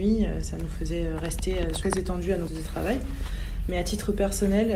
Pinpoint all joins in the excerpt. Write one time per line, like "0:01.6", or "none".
0:01.8
0:02.5